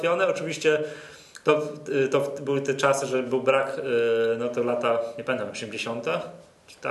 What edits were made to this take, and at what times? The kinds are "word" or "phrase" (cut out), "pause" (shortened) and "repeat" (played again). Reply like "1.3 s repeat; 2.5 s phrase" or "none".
none